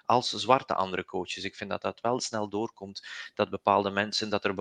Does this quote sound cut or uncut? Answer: uncut